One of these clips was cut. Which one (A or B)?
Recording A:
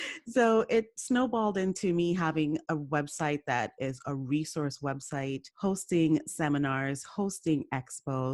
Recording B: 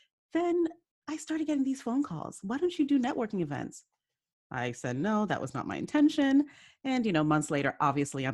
A